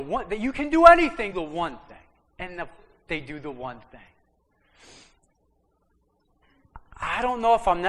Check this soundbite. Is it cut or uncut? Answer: cut